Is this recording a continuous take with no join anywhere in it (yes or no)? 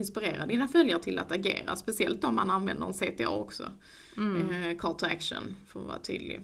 yes